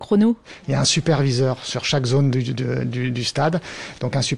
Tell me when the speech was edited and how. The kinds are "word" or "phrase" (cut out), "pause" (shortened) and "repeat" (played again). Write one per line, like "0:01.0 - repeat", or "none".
none